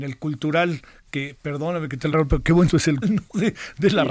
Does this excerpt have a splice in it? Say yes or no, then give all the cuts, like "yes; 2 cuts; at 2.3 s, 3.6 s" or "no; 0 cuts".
yes; 3 cuts; at 2.1 s, 2.7 s, 3.0 s